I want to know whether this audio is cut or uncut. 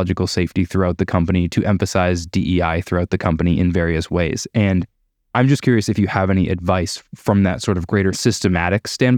uncut